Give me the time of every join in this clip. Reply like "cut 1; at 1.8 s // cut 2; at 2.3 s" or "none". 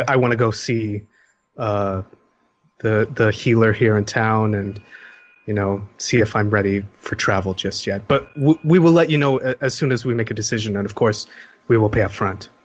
none